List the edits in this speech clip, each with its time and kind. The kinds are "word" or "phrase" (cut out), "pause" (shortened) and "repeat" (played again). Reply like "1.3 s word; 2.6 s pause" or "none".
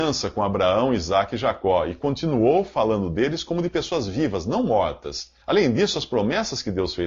5.4 s pause